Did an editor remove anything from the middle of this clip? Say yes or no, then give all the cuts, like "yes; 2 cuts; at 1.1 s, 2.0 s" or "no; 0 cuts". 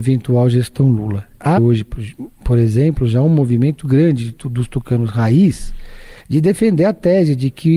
yes; 2 cuts; at 1.6 s, 6.2 s